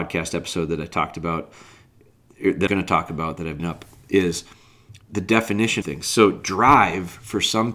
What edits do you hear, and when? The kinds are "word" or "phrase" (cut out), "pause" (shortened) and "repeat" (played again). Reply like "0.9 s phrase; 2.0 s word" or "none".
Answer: 2.7 s word; 3.6 s phrase; 5.0 s pause; 5.8 s word